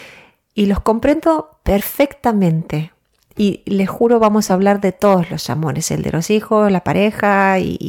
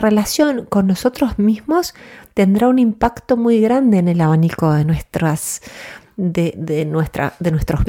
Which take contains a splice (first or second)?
second